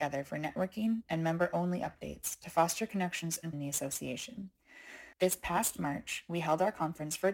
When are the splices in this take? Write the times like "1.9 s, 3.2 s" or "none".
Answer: 3.5 s, 5.1 s